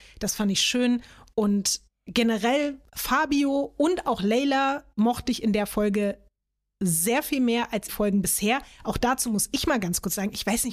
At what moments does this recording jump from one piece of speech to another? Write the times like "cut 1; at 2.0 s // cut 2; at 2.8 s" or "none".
cut 1; at 7.9 s